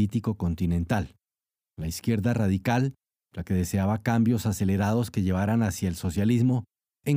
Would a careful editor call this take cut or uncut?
uncut